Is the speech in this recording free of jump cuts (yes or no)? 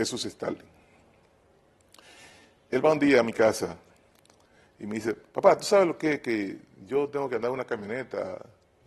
yes